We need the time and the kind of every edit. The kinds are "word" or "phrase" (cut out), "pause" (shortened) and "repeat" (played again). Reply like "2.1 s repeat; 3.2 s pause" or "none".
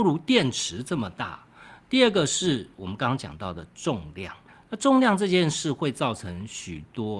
4.5 s pause